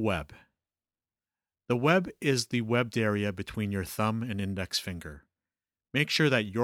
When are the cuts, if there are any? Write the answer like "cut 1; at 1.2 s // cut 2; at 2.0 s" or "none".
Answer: none